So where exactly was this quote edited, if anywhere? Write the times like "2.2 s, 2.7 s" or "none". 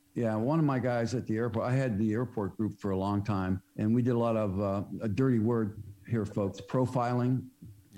3.7 s